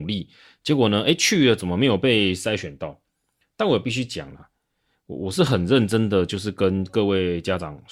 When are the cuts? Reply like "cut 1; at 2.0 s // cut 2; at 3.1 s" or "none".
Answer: none